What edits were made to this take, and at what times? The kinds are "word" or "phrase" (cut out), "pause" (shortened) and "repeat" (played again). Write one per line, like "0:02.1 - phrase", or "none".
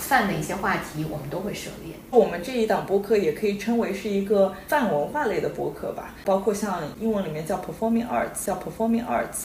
0:08.5 - repeat